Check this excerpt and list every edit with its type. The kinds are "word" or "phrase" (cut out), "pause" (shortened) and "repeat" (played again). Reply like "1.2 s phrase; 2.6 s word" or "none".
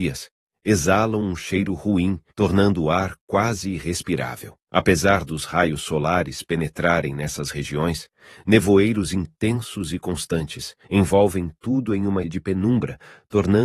2.3 s pause; 4.6 s pause; 10.8 s pause; 12.2 s word